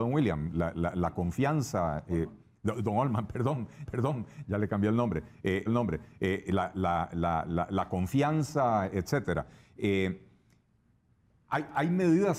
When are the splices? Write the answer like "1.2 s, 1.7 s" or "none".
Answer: 3.9 s, 5.7 s

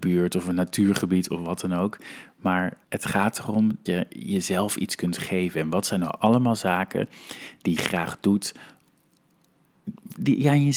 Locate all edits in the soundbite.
2.8 s, 3.9 s, 7.8 s

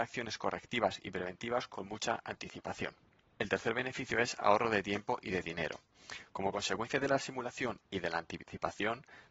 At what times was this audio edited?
none

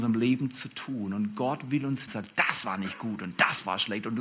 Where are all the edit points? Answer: 2.1 s

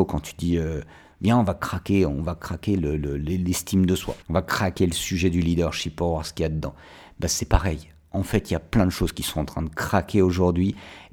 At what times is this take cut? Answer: 4.2 s

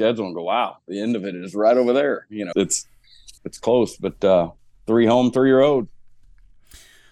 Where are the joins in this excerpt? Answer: 2.5 s, 3.4 s, 4.6 s

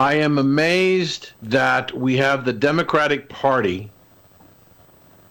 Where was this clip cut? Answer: 1.3 s

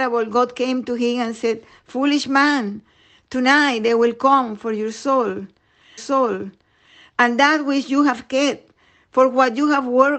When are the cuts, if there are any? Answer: 6.0 s

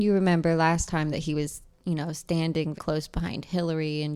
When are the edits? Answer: 1.1 s, 2.7 s

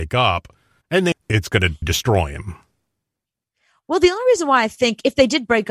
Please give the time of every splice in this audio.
1.1 s, 1.8 s

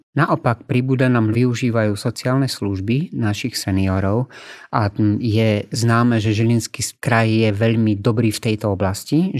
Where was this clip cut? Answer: 1.3 s

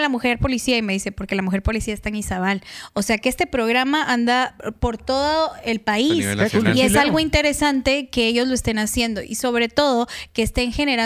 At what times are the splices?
none

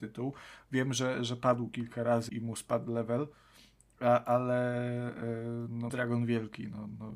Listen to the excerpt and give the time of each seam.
2.3 s, 5.9 s

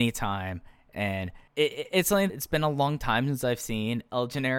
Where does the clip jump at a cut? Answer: 1.5 s, 2.3 s

